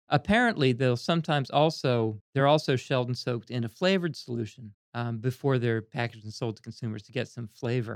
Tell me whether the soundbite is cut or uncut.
uncut